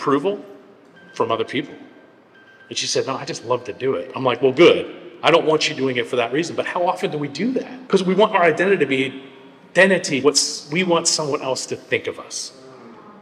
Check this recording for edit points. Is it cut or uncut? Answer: cut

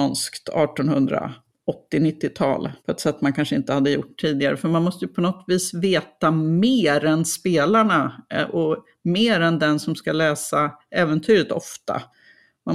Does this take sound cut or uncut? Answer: cut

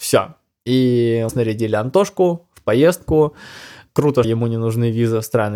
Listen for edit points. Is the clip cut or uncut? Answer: cut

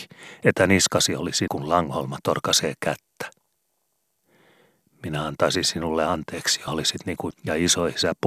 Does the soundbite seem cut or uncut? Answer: cut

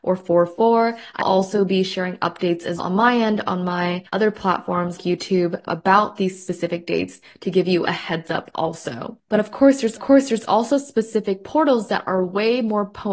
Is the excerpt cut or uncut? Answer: cut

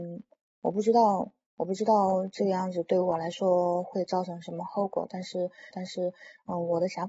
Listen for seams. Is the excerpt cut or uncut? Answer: cut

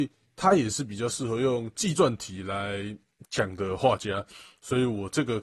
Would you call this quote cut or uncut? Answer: uncut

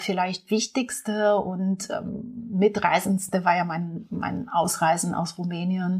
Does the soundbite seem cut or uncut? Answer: uncut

